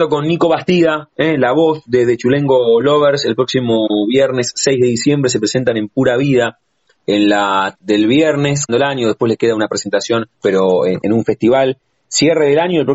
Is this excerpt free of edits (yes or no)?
no